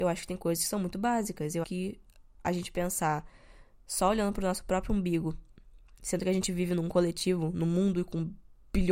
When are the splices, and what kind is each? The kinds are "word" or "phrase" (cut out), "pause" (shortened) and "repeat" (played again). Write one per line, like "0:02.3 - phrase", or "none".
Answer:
0:01.6 - word